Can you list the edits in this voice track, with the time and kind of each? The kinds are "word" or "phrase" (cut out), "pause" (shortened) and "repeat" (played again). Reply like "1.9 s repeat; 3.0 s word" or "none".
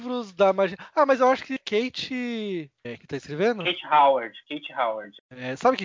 1.6 s word; 3.0 s word